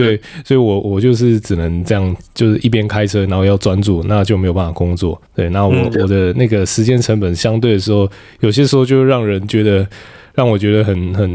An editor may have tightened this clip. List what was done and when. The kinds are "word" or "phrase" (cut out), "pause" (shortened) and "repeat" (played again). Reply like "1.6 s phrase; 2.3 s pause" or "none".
5.3 s pause